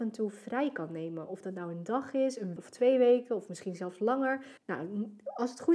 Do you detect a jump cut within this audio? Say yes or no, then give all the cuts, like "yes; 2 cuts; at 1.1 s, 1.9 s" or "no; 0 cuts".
yes; 2 cuts; at 2.6 s, 4.6 s